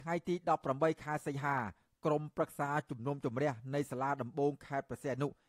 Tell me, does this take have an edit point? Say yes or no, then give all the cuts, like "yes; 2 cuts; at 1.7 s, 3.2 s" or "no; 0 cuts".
no; 0 cuts